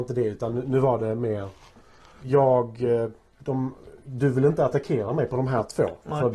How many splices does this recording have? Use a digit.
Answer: 0